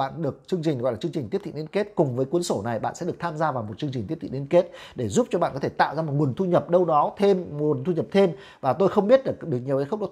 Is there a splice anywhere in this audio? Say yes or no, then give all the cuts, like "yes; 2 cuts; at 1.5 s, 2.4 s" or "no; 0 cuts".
no; 0 cuts